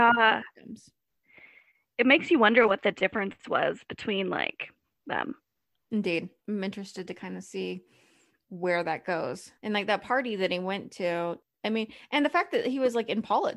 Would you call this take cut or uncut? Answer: cut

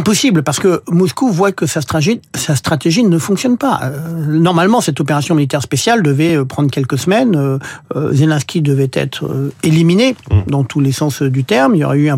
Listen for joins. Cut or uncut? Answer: uncut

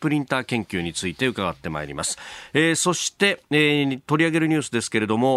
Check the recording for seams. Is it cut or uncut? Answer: uncut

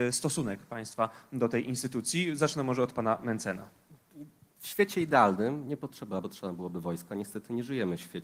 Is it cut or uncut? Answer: cut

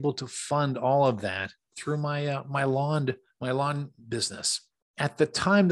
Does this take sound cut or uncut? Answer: uncut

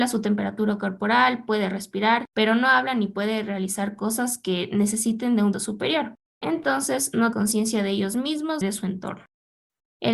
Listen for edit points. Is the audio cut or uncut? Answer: cut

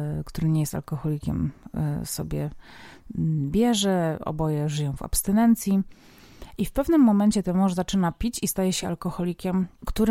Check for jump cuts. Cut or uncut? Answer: uncut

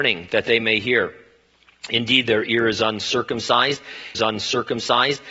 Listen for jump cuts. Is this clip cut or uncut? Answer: cut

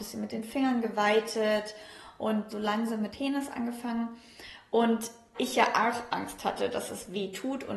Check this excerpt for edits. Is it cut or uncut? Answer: cut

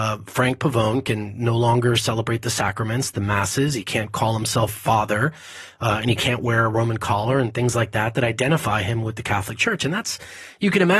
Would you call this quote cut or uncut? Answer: uncut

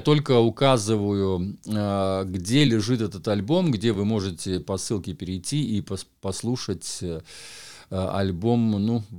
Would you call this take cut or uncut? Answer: uncut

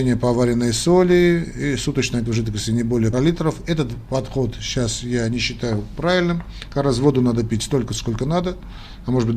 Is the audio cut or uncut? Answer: cut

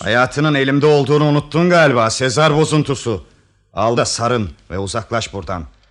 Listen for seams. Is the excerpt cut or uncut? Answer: cut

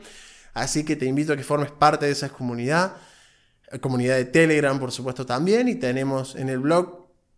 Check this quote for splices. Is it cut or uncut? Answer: uncut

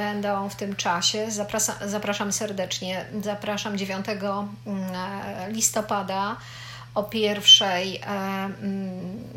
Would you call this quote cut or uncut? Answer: uncut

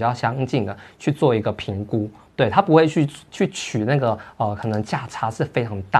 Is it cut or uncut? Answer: uncut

